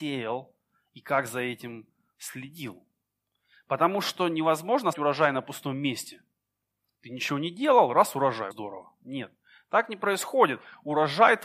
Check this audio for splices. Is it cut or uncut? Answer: cut